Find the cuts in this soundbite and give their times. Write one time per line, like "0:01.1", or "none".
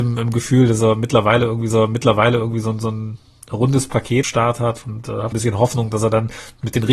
0:01.7
0:04.2
0:05.3